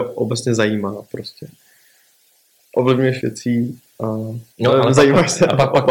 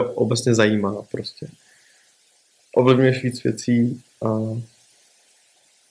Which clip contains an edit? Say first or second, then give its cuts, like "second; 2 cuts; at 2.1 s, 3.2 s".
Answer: first; 2 cuts; at 3.2 s, 4.5 s